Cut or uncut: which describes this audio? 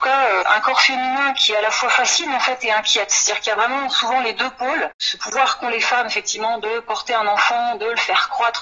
uncut